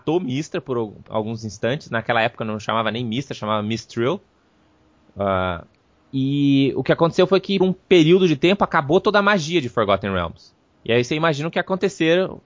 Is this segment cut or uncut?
cut